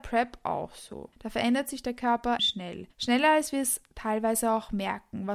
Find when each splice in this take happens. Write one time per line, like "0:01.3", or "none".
0:01.1
0:02.4
0:02.9